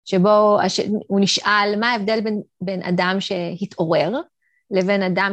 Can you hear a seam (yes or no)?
no